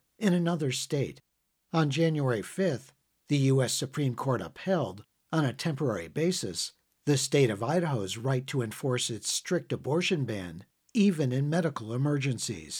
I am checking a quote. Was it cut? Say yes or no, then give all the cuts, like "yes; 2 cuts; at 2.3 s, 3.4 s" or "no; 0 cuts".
no; 0 cuts